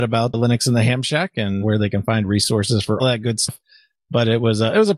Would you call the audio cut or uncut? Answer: cut